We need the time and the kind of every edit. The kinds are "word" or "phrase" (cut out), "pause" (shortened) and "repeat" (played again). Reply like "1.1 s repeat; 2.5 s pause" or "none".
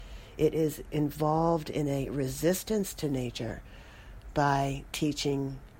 none